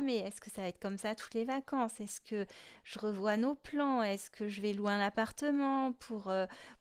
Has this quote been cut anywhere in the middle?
no; 0 cuts

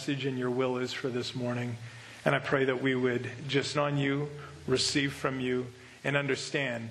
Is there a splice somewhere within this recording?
yes; 1 cut; at 3.7 s

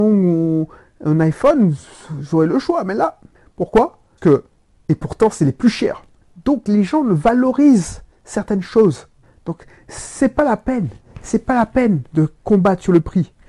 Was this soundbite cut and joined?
yes; 1 cut; at 4.2 s

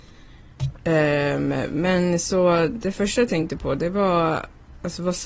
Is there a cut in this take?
no; 0 cuts

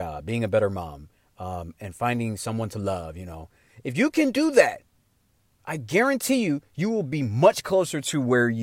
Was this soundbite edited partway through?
no; 0 cuts

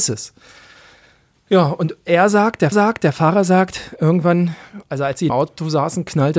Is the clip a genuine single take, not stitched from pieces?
no; 2 cuts; at 2.7 s, 5.3 s

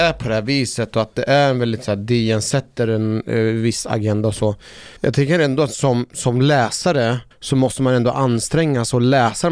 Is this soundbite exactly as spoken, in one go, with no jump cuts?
no; 2 cuts; at 5.0 s, 7.3 s

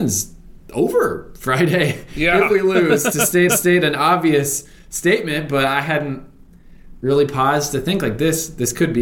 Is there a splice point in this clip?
yes; 1 cut; at 3.5 s

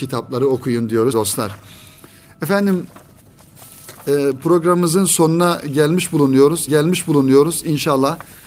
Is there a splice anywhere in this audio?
yes; 2 cuts; at 1.1 s, 6.7 s

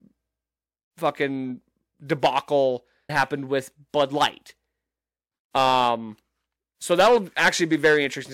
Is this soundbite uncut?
no; 1 cut; at 3.1 s

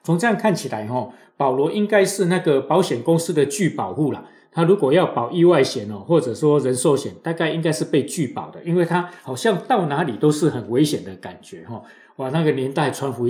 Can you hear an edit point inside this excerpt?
no; 0 cuts

